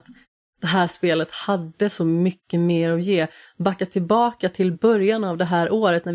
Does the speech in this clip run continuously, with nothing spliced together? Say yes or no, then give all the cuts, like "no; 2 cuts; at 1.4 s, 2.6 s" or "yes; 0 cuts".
yes; 0 cuts